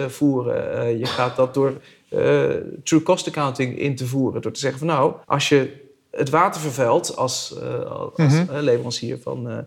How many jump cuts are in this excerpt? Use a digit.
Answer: 1